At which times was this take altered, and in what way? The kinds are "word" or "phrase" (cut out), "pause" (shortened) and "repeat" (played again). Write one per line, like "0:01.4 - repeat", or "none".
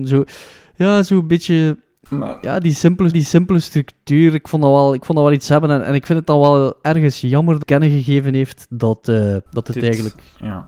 0:03.1 - repeat
0:07.6 - phrase
0:09.5 - pause